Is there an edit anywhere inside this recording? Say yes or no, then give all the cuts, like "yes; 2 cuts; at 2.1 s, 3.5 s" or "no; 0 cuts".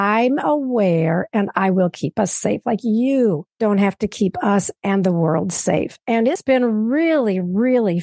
no; 0 cuts